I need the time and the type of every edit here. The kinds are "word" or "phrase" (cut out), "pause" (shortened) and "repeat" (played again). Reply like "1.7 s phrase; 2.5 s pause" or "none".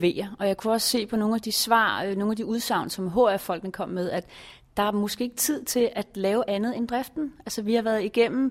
none